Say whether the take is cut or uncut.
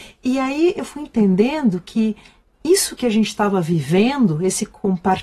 uncut